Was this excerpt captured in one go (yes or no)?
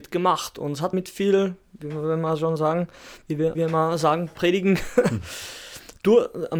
no